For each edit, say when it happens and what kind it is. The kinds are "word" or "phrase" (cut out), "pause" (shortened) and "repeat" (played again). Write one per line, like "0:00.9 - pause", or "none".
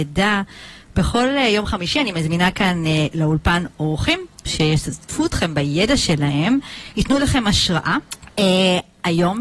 0:08.1 - pause